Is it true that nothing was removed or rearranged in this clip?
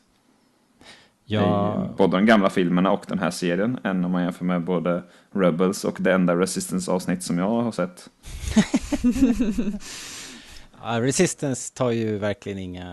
yes; 0 cuts

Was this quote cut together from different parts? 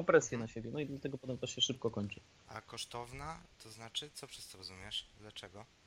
no; 0 cuts

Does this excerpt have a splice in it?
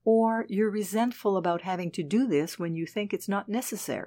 no; 0 cuts

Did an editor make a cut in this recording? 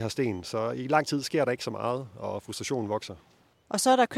no; 0 cuts

